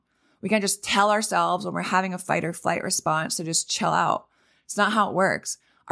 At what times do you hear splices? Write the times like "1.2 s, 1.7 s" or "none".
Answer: none